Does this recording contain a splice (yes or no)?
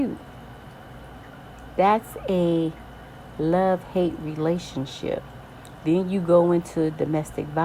no